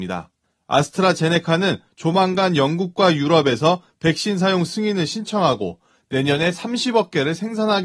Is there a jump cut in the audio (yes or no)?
no